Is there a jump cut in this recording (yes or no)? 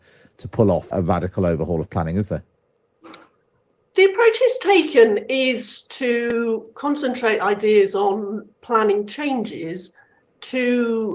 yes